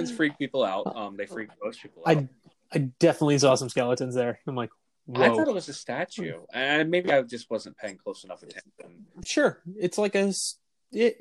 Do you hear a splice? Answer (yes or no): no